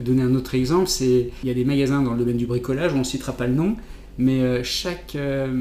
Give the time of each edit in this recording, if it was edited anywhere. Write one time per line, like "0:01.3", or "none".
none